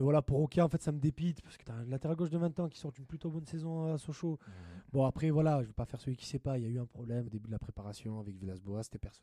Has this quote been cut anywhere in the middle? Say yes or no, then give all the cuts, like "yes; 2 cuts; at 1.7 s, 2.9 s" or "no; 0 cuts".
yes; 2 cuts; at 1.6 s, 7.3 s